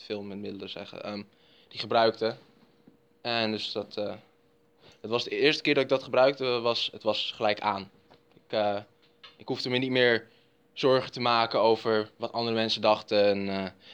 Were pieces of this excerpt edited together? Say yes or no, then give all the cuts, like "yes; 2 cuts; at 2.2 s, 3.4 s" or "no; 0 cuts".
no; 0 cuts